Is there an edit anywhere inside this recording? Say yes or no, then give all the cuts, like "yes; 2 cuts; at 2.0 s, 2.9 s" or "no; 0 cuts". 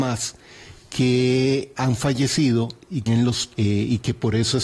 yes; 3 cuts; at 1.7 s, 3.1 s, 3.5 s